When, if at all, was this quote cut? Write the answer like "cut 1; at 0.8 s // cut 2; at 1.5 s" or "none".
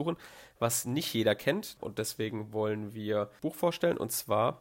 none